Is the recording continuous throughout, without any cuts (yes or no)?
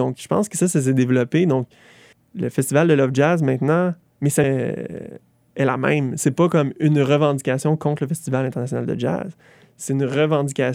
no